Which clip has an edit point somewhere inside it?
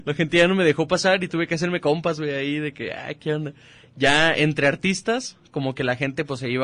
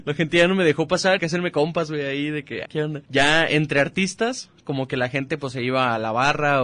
second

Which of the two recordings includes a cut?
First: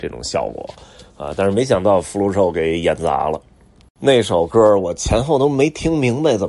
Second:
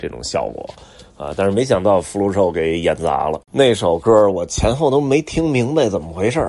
second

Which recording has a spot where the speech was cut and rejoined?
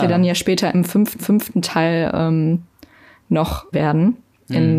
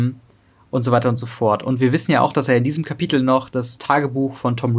first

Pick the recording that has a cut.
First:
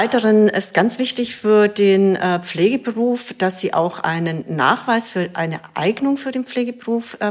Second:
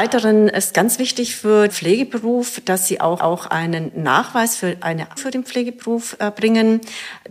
second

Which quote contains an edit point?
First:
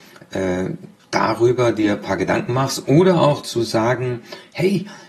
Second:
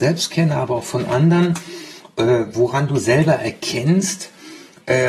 first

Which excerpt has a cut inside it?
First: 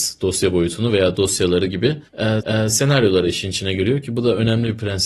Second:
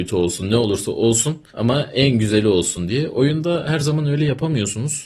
first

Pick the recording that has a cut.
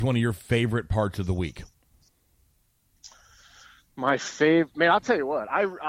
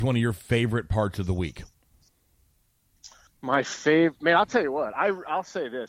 second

